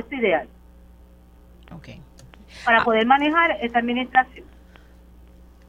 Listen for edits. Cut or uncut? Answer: uncut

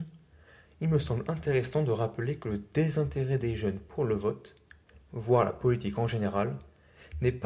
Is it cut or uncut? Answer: uncut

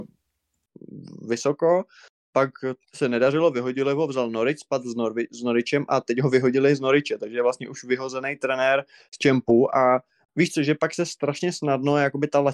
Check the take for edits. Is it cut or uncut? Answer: uncut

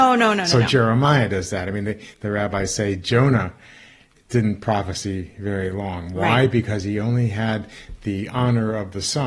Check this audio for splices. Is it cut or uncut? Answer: uncut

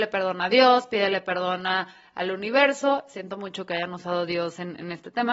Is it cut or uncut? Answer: uncut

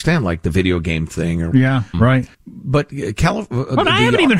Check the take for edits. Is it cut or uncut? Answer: cut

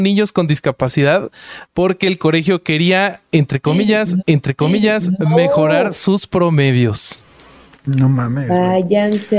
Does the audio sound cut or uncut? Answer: cut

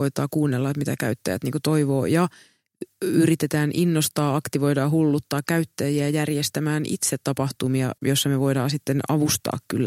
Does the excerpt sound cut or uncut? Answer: cut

